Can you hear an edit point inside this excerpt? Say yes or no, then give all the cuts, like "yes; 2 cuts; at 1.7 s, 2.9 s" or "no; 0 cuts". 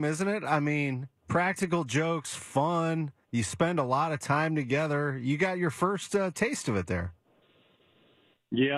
no; 0 cuts